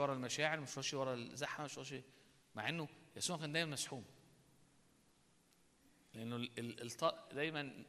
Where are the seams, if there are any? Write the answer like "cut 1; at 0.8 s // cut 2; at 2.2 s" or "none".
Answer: none